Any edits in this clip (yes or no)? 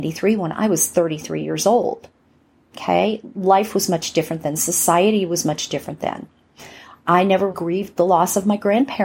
yes